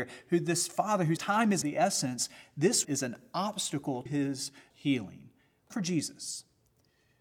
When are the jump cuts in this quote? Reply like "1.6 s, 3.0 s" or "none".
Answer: 1.2 s, 1.6 s, 2.8 s, 4.1 s, 4.7 s, 5.7 s